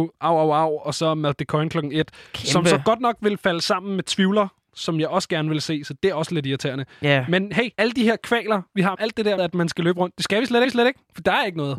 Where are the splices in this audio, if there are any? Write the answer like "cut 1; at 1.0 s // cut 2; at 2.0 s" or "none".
cut 1; at 7.7 s // cut 2; at 8.9 s // cut 3; at 9.4 s // cut 4; at 10.6 s